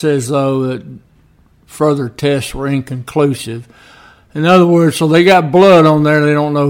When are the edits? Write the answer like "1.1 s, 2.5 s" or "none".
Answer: none